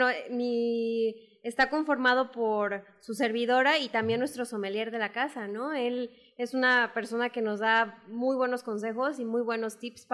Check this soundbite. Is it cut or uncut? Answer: uncut